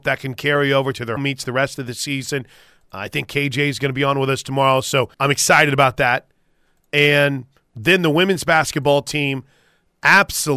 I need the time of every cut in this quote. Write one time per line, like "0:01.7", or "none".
0:01.2
0:05.1